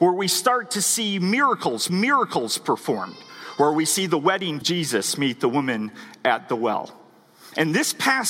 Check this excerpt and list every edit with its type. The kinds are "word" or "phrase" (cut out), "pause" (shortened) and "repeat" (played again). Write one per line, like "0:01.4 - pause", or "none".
0:01.9 - repeat
0:04.6 - phrase